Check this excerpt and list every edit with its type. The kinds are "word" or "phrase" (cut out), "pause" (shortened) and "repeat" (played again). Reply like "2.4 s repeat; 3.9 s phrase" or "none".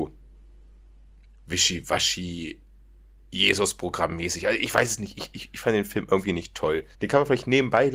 6.9 s pause